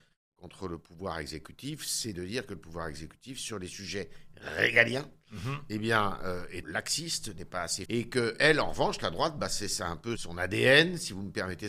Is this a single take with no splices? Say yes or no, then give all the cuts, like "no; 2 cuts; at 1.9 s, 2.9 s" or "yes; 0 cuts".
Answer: no; 3 cuts; at 6.6 s, 7.9 s, 10.2 s